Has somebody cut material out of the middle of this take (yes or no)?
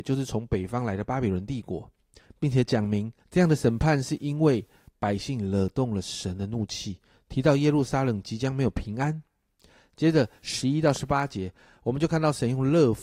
yes